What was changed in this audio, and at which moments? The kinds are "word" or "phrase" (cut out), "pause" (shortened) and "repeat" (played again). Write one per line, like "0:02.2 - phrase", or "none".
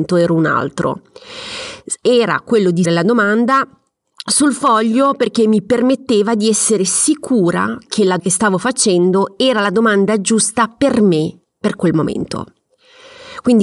0:02.8 - word
0:08.2 - word